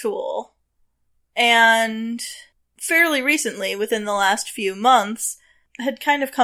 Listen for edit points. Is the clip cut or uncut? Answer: uncut